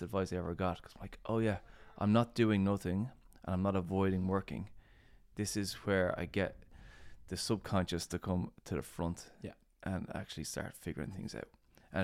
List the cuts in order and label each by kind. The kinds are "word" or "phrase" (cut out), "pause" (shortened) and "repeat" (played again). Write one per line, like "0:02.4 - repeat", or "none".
0:08.6 - pause